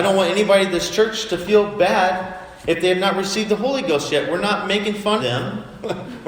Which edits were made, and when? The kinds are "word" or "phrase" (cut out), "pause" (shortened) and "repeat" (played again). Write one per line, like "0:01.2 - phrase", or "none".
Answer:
0:05.2 - word